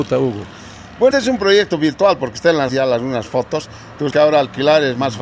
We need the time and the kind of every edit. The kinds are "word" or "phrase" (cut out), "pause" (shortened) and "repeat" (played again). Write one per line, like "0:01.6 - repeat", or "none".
0:01.1 - word
0:02.7 - word
0:04.1 - word